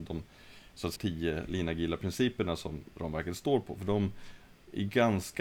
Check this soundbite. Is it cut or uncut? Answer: cut